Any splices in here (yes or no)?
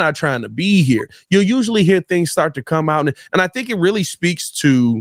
no